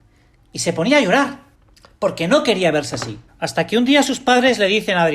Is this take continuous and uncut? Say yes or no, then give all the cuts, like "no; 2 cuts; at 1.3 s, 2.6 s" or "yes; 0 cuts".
no; 2 cuts; at 1.5 s, 3.3 s